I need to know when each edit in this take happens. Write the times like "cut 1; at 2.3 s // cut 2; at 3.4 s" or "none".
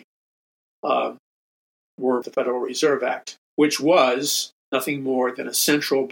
cut 1; at 2.2 s // cut 2; at 3.4 s